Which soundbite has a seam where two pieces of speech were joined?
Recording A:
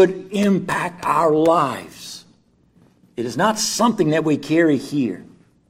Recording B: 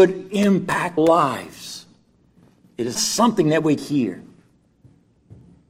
B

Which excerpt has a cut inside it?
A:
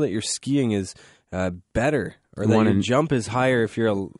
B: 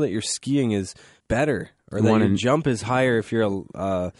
B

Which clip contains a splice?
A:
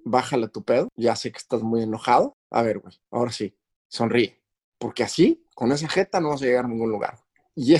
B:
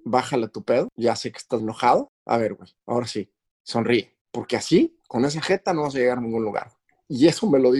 B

